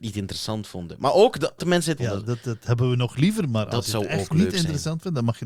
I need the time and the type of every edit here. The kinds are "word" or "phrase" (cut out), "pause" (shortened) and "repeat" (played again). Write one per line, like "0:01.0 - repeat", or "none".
0:01.6 - word
0:02.0 - word